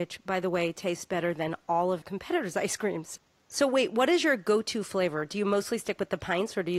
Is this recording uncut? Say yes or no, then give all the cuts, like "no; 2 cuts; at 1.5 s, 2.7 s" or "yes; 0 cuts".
no; 1 cut; at 2.0 s